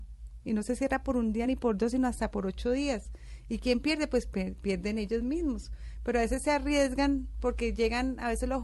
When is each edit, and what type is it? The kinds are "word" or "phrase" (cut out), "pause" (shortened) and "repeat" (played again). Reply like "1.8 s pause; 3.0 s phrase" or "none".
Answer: none